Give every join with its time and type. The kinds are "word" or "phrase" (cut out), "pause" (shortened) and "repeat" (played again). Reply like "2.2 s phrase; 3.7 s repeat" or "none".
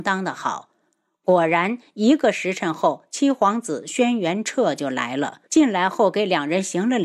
5.5 s pause